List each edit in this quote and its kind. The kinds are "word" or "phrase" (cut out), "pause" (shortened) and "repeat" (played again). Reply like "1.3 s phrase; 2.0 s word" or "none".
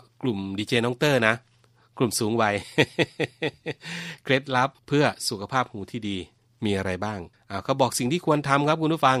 none